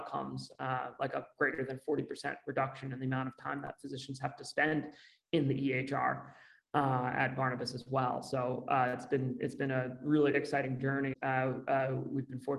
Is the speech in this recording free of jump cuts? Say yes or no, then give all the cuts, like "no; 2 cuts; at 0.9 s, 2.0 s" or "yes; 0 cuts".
no; 2 cuts; at 10.3 s, 11.1 s